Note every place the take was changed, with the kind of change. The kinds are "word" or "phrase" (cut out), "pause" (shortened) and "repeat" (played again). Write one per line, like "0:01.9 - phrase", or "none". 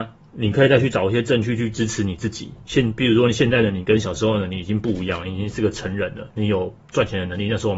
0:06.3 - pause